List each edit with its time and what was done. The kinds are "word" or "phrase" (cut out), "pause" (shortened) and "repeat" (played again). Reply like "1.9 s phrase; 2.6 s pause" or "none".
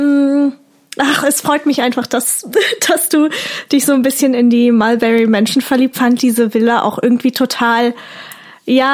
5.9 s phrase